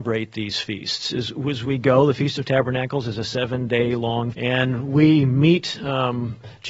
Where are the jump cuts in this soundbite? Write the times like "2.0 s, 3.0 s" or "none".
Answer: 4.3 s

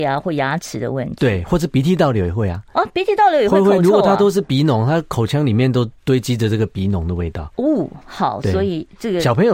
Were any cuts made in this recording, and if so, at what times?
6.0 s, 7.5 s

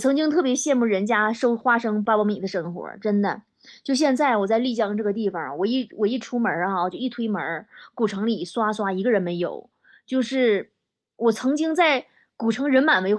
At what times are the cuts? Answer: none

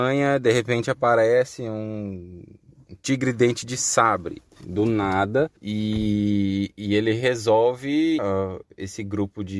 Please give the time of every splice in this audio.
4.5 s, 5.6 s, 8.2 s

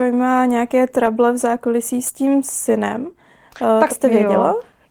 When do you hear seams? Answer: 3.9 s

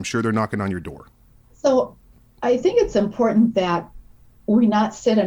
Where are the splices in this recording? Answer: none

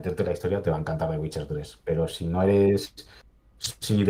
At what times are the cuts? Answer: none

